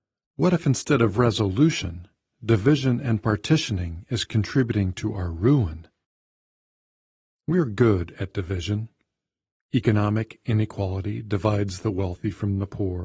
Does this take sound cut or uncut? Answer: uncut